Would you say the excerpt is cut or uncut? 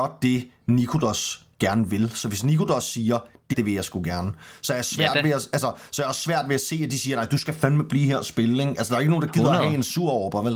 cut